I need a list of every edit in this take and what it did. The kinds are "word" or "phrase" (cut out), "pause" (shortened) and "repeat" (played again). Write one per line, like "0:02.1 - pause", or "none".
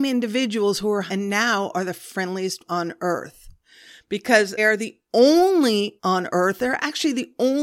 0:01.1 - word
0:02.7 - word
0:04.6 - word
0:06.0 - word